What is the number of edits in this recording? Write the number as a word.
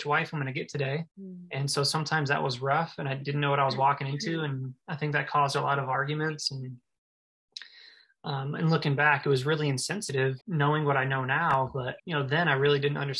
three